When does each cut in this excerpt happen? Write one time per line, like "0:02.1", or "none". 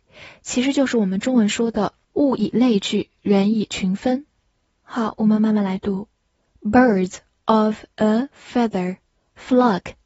none